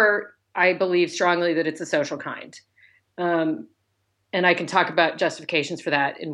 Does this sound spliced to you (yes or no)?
no